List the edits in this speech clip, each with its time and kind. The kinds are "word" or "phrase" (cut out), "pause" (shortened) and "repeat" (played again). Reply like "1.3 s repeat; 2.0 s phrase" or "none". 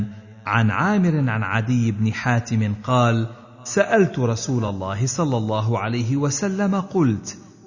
none